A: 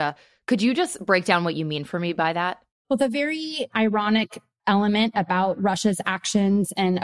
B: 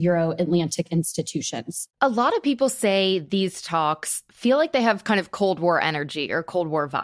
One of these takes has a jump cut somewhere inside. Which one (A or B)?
B